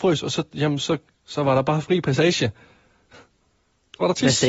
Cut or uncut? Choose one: uncut